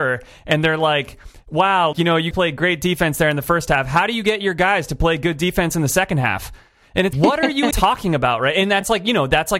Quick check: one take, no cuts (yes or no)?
no